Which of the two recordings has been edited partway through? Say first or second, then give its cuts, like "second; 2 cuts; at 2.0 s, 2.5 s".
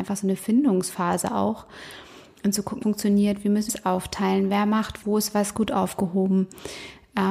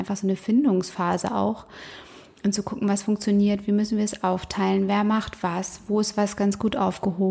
first; 4 cuts; at 2.8 s, 3.7 s, 5.0 s, 5.5 s